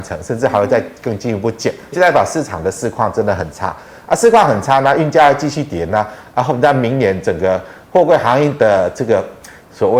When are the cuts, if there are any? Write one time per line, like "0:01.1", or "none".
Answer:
0:01.9